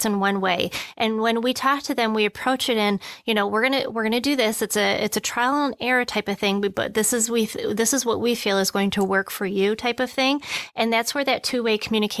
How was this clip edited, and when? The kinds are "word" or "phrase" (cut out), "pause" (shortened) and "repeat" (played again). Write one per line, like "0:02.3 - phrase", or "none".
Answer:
none